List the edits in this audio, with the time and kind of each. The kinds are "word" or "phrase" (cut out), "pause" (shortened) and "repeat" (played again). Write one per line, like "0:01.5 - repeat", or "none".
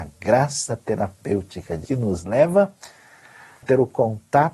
0:01.8 - word
0:03.6 - word